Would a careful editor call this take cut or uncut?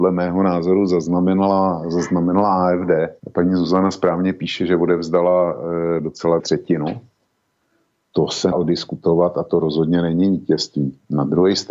cut